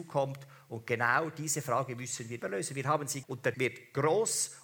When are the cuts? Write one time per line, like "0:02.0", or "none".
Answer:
0:02.4
0:03.2
0:03.5